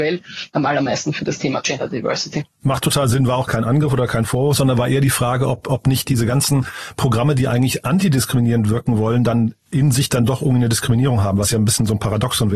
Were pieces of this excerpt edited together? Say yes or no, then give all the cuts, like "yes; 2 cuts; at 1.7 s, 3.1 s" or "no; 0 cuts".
yes; 1 cut; at 3.5 s